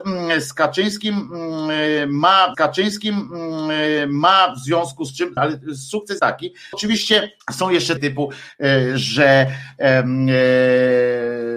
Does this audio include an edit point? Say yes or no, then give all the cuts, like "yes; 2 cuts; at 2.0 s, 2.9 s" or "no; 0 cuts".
yes; 6 cuts; at 2.5 s, 5.4 s, 6.2 s, 6.7 s, 7.4 s, 8.0 s